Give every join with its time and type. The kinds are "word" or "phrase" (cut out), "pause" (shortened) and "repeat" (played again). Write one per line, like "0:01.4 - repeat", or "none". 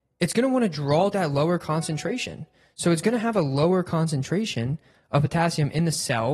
0:01.1 - word